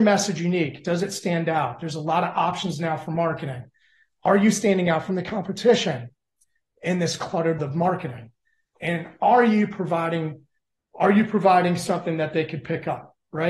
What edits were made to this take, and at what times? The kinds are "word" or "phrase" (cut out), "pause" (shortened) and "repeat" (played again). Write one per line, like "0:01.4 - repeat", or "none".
0:07.6 - word